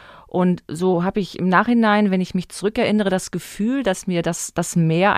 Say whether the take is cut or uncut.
uncut